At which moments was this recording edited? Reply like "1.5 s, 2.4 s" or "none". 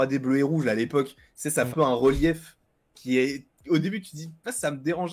1.7 s